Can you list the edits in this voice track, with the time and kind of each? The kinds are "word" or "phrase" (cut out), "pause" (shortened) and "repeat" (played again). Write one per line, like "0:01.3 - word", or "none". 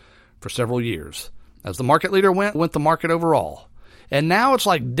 0:02.5 - word